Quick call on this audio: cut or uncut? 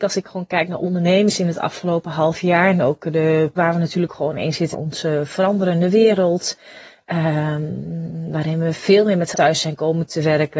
cut